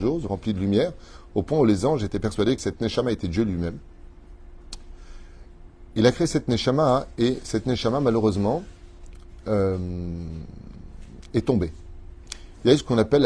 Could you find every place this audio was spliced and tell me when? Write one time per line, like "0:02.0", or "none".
0:02.6

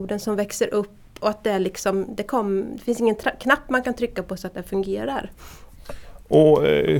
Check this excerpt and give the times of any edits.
none

